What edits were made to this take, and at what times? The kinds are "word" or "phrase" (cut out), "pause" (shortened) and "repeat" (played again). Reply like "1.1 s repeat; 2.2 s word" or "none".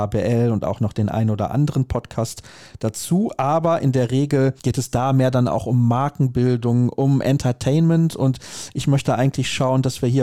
4.6 s pause